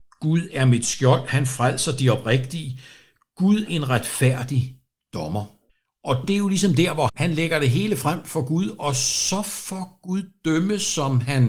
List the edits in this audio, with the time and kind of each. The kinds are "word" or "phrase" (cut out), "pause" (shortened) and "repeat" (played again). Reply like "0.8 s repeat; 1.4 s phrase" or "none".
3.7 s word; 5.7 s pause; 7.1 s word